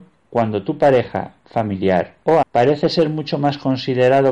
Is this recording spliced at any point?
yes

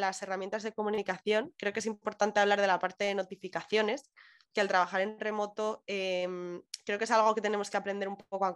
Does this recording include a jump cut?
no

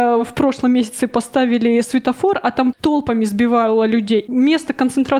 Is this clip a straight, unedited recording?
no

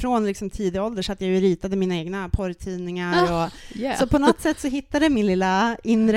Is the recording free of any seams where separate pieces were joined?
yes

